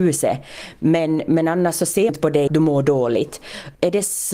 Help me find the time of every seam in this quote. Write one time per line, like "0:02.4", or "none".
0:02.1
0:02.5